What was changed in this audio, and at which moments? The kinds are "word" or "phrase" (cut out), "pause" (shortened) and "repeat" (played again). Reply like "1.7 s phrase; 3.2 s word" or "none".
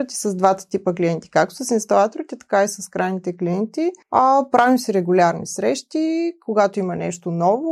4.0 s pause